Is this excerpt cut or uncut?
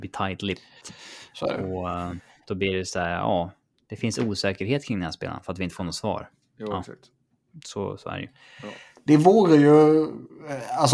uncut